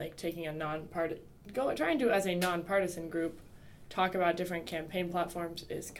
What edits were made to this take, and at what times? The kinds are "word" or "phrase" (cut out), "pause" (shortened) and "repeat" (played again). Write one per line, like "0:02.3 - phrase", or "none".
none

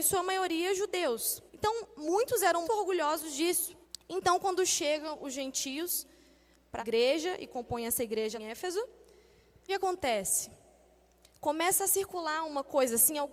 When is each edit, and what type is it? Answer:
0:01.5 - pause
0:02.6 - word
0:03.8 - pause
0:06.8 - word
0:08.3 - word
0:09.7 - phrase

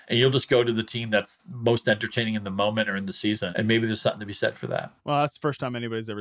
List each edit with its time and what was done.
0:03.5 - word
0:05.0 - pause

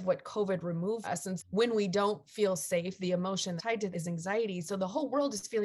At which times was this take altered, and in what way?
0:01.0 - word
0:01.4 - word
0:03.6 - word
0:03.9 - word

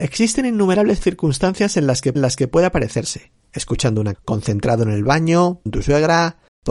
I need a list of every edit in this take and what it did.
0:02.1 - repeat
0:03.4 - pause
0:04.1 - word
0:05.7 - word

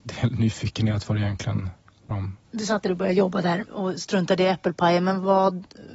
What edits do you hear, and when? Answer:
0:02.1 - word
0:02.4 - pause

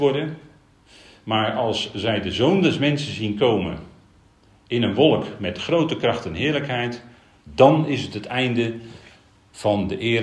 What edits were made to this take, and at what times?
none

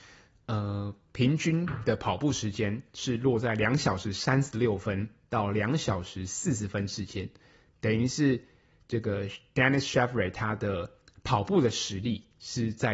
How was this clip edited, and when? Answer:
none

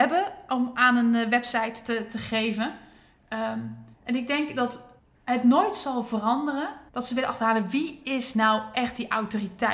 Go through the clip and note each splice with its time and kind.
0:03.9 - pause
0:05.0 - pause
0:06.9 - pause

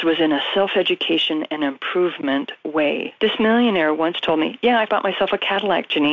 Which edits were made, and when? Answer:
0:04.9 - word

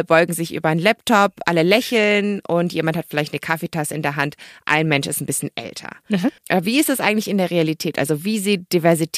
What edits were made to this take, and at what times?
0:06.4 - pause

